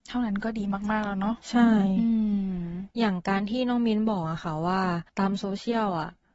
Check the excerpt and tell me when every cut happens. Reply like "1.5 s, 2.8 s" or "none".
2.9 s, 5.1 s